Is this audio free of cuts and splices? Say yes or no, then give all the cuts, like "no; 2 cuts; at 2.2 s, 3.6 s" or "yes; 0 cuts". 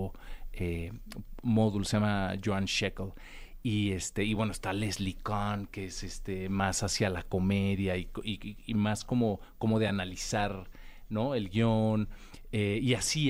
yes; 0 cuts